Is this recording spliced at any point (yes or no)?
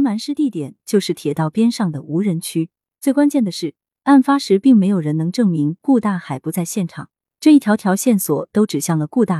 no